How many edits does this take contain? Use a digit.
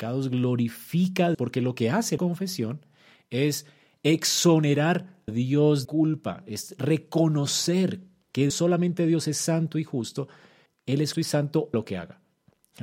8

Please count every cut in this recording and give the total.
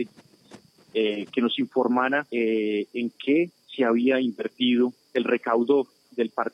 2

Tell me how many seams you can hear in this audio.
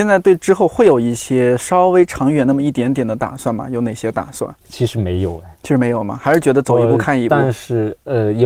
1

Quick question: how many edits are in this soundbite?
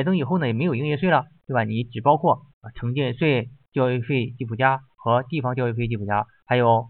1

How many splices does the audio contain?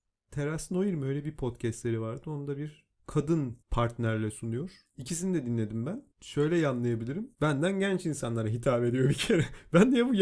3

